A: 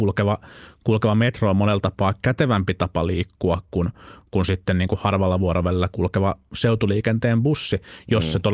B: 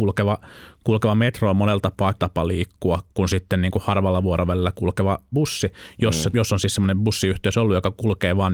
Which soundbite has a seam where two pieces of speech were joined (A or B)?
B